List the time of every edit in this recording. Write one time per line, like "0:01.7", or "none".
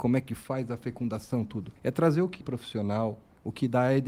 0:01.8
0:02.4

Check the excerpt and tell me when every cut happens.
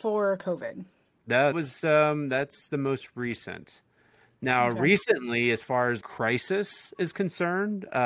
0:01.5
0:06.0

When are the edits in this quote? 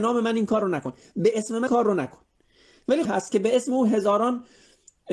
0:01.7
0:03.0

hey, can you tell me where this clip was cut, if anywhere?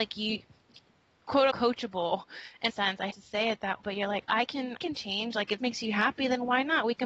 0:01.5
0:02.7
0:03.1
0:03.8
0:04.8
0:05.6

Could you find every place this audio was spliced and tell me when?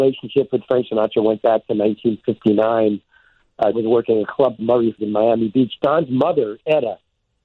0:03.7
0:04.6
0:05.0

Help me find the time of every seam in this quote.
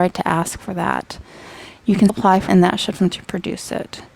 0:02.1
0:02.5
0:03.0

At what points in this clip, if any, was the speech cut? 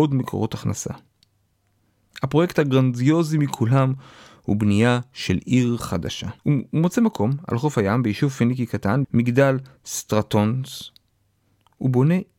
0:06.4
0:09.0

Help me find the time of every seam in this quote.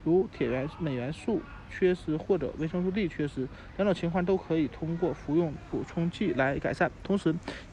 none

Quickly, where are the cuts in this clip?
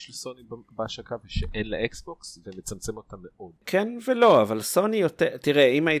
0:03.6

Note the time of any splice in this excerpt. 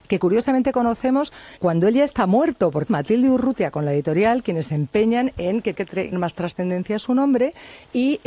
0:01.6
0:02.9
0:05.7
0:06.1

